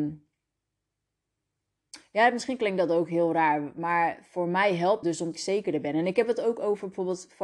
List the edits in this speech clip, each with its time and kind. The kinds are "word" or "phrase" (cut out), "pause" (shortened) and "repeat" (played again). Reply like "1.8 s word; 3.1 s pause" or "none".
5.0 s word; 5.3 s phrase